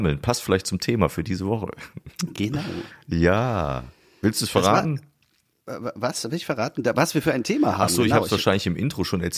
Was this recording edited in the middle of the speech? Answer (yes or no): no